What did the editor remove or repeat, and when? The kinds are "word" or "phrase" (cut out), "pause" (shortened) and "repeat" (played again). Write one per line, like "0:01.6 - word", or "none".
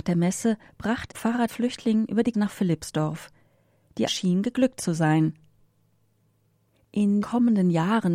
0:01.1 - word
0:01.5 - word
0:02.3 - word
0:04.1 - word
0:07.2 - word